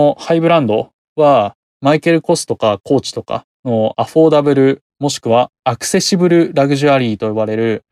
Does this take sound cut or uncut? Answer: cut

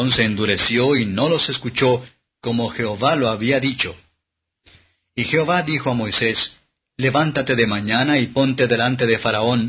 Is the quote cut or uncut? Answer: uncut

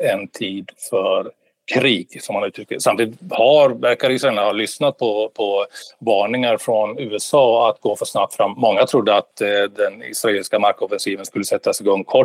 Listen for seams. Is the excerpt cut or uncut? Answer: uncut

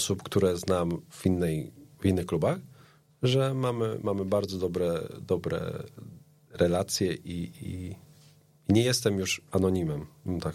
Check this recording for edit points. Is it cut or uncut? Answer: uncut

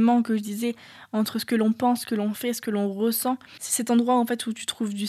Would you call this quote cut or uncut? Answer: uncut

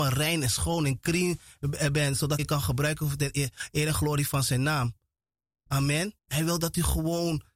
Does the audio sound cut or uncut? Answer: cut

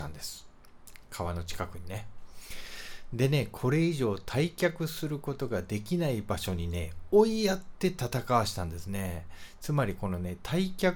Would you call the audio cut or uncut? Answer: uncut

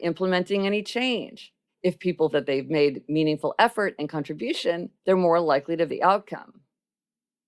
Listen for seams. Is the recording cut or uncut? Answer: cut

